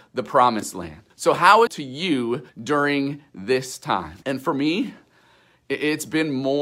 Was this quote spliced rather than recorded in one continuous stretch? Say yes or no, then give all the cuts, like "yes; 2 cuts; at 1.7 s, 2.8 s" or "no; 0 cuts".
yes; 4 cuts; at 1.1 s, 1.7 s, 2.5 s, 4.2 s